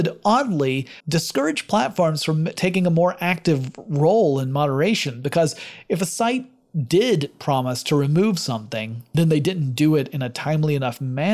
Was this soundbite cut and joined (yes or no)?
yes